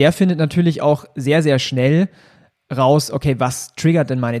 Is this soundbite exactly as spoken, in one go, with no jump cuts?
yes; 0 cuts

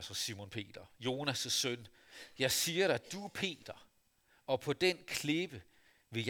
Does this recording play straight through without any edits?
yes; 0 cuts

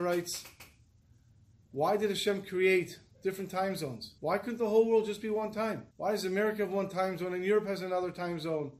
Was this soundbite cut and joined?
yes; 2 cuts; at 4.2 s, 5.9 s

